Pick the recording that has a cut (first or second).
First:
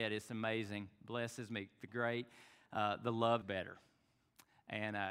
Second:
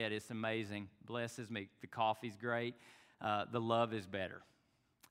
first